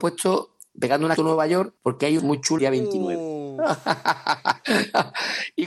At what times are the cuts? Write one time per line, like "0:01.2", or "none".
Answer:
0:01.2
0:01.8
0:02.2
0:02.6